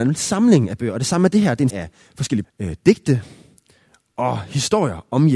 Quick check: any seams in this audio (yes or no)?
yes